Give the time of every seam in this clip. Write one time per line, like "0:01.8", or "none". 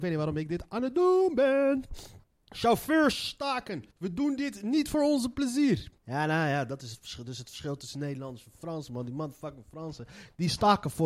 0:02.2
0:03.9
0:06.0